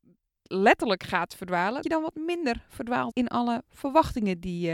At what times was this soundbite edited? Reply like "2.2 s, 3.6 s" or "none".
1.8 s, 3.1 s